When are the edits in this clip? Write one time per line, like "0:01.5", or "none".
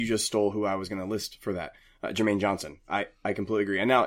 none